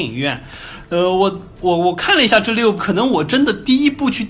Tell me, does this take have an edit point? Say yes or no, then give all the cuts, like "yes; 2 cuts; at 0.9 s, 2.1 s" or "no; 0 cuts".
yes; 1 cut; at 2.8 s